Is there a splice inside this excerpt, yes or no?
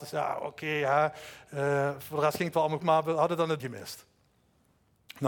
yes